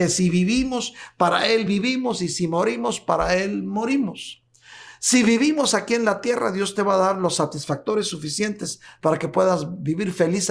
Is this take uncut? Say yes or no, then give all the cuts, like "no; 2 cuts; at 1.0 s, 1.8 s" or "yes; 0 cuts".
yes; 0 cuts